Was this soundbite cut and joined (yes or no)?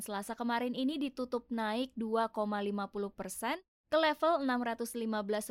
no